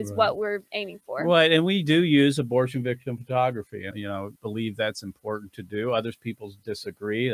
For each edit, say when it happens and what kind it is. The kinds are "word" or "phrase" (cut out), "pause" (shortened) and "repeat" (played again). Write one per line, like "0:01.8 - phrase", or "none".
0:03.9 - word
0:04.4 - word